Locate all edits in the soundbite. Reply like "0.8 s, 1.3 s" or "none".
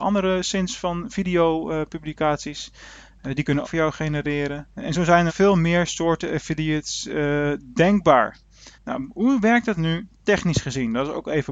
3.6 s, 4.7 s, 5.3 s, 8.7 s